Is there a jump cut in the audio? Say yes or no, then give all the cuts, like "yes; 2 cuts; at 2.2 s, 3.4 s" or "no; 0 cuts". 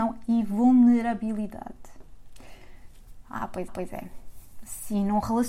yes; 1 cut; at 3.7 s